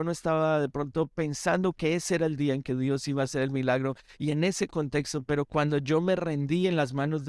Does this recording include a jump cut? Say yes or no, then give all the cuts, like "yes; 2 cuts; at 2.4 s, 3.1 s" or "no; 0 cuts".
no; 0 cuts